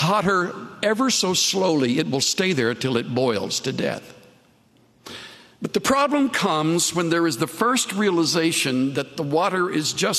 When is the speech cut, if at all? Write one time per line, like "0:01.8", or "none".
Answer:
none